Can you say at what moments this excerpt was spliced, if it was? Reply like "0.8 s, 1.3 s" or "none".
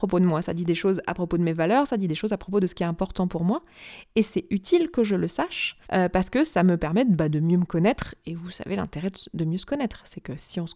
5.8 s